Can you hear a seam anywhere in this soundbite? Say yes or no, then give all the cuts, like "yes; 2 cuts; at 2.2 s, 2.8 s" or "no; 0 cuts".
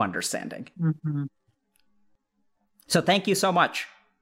no; 0 cuts